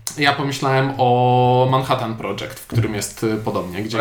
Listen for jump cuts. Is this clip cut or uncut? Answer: uncut